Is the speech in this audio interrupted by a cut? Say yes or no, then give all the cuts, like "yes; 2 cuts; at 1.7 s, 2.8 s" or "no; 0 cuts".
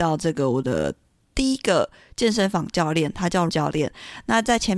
yes; 1 cut; at 3.5 s